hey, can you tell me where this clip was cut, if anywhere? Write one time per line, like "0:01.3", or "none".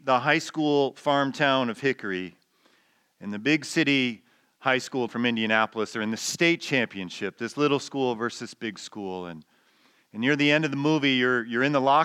0:05.1